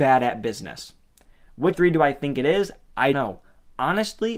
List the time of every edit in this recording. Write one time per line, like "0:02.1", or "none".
0:01.7
0:03.1